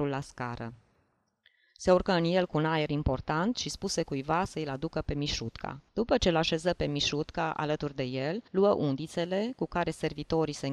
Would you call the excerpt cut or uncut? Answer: cut